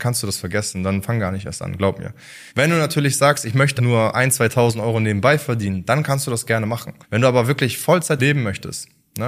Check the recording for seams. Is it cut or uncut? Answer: cut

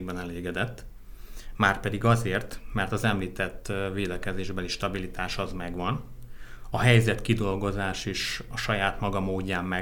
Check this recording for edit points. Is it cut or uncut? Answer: uncut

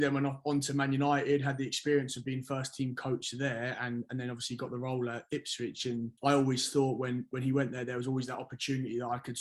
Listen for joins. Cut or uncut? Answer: cut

